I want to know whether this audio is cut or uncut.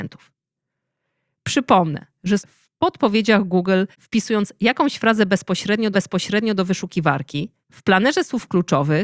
cut